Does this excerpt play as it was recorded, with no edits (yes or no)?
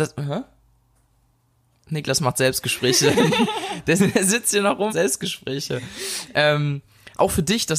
no